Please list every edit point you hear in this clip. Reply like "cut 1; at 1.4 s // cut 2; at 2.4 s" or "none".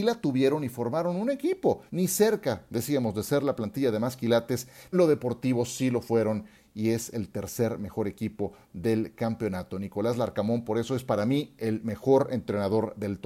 cut 1; at 1.9 s // cut 2; at 4.9 s